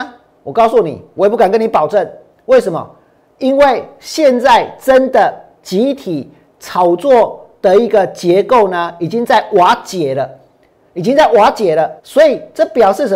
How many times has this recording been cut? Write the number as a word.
one